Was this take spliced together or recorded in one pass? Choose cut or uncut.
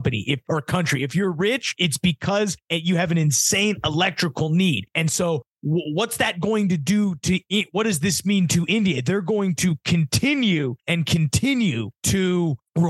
uncut